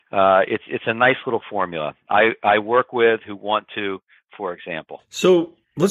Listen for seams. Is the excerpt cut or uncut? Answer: uncut